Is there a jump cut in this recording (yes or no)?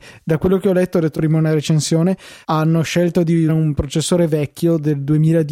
yes